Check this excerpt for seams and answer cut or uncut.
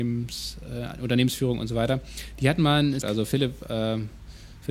cut